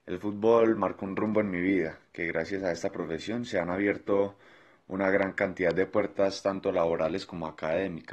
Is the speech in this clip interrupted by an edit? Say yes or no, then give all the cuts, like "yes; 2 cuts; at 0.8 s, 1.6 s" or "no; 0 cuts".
no; 0 cuts